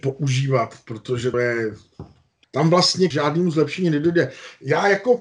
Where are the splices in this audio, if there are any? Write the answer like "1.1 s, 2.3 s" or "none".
1.3 s, 2.4 s, 3.1 s